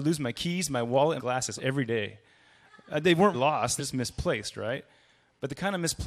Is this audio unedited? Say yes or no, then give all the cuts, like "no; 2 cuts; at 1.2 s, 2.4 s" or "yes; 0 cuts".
no; 4 cuts; at 1.2 s, 1.6 s, 3.3 s, 3.8 s